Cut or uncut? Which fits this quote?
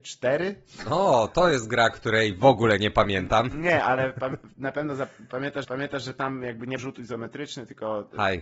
cut